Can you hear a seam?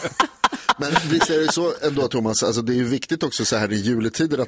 no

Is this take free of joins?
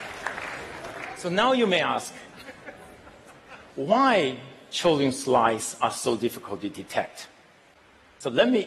yes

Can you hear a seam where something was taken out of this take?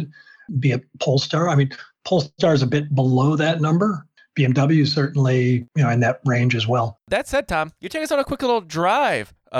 yes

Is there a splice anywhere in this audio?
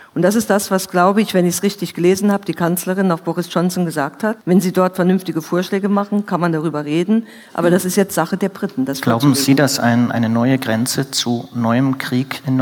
yes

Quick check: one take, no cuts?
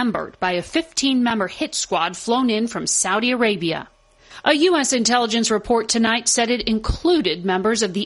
yes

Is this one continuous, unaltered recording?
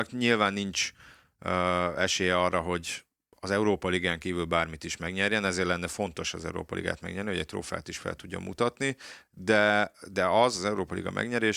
yes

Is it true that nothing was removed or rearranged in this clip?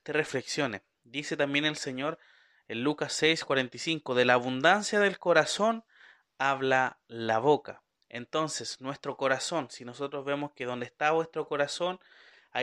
yes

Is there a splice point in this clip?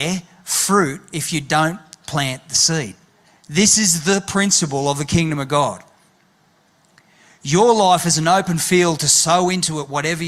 yes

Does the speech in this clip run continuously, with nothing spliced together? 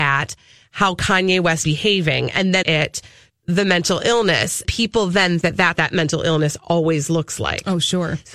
no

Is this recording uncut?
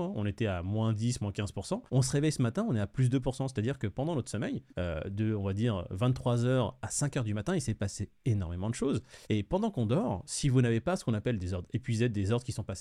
no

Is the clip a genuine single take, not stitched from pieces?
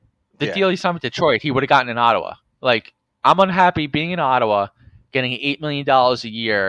yes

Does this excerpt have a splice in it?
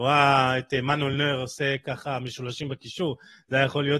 no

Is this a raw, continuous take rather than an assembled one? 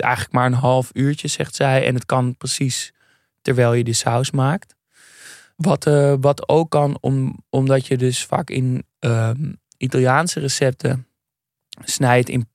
yes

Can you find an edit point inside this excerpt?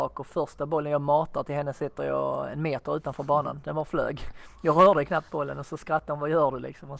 no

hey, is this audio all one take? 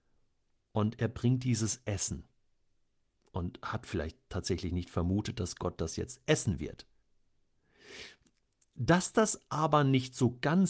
yes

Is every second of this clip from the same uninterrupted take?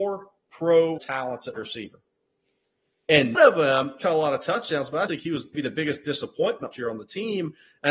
no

